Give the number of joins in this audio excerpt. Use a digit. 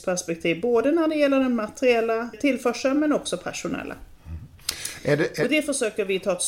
1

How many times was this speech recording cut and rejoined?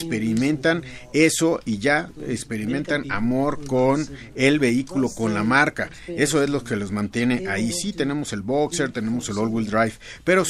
0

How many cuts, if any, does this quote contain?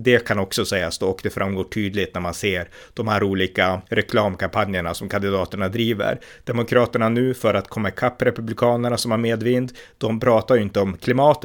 1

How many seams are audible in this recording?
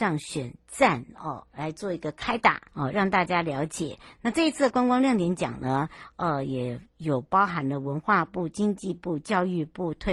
1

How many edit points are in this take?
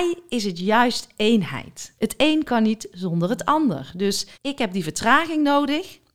2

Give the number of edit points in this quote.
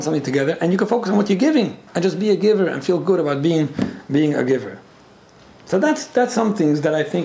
1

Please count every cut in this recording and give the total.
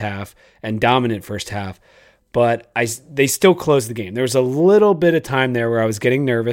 0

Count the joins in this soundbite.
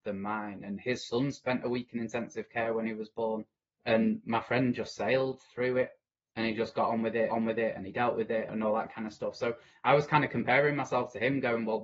3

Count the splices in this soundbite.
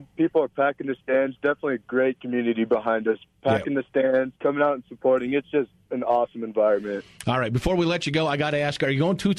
1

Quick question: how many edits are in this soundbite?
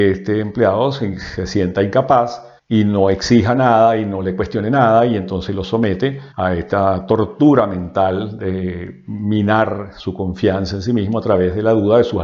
2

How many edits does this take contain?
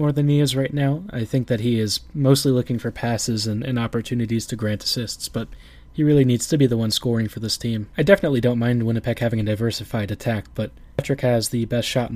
0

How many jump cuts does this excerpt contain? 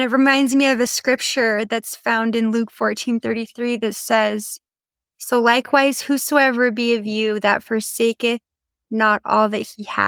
0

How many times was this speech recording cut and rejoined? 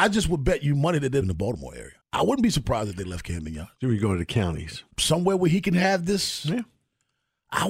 4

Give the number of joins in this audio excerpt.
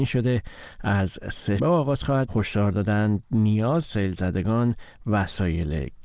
3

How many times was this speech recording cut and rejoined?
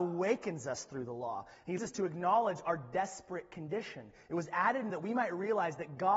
2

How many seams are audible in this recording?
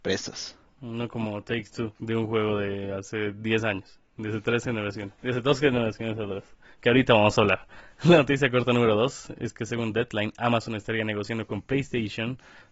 2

